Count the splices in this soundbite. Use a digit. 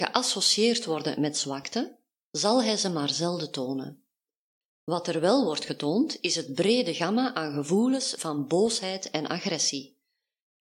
0